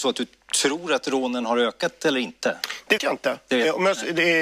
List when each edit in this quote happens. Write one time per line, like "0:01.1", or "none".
0:03.0